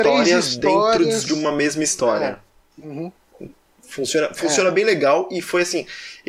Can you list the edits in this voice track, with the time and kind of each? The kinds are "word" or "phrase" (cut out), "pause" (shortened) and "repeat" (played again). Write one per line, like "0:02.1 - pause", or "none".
none

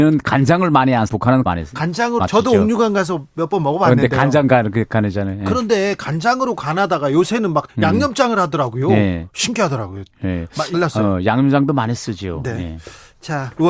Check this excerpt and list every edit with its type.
0:01.1 - word
0:01.5 - word
0:02.2 - phrase
0:07.7 - word
0:10.7 - word

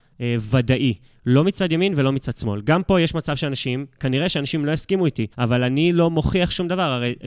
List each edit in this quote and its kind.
0:05.3 - pause

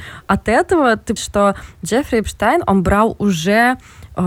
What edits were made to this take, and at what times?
0:01.2 - word

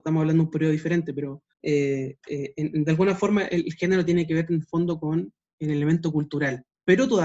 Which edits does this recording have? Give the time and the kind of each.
0:01.5 - pause

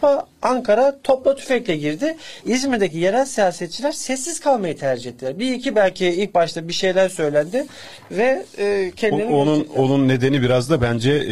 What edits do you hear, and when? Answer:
none

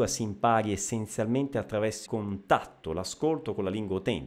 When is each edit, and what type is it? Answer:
0:02.1 - word

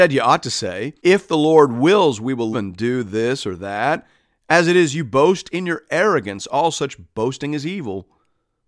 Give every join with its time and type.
0:01.0 - pause
0:02.5 - word

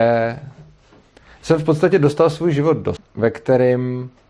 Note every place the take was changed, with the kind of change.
0:03.0 - word

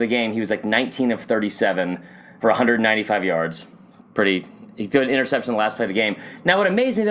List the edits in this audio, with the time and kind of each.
none

